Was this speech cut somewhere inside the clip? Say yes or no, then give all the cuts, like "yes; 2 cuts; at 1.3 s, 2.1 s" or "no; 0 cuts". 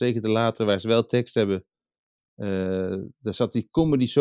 no; 0 cuts